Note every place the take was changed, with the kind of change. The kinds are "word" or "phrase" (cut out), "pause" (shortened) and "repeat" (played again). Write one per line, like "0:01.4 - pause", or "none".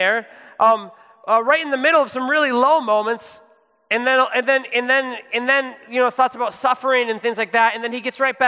none